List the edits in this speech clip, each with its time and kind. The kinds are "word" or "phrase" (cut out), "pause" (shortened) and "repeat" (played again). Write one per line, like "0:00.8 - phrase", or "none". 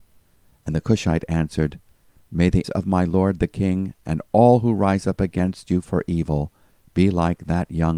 0:02.6 - word